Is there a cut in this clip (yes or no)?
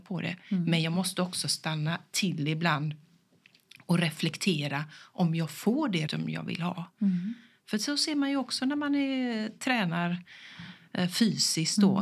yes